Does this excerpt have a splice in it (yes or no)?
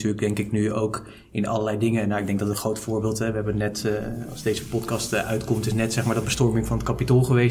no